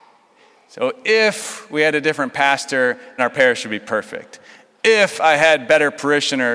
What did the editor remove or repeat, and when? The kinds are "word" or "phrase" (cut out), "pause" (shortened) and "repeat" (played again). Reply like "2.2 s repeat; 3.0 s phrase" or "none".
3.2 s word